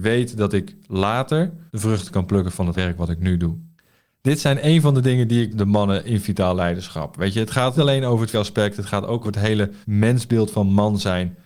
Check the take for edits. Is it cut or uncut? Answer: cut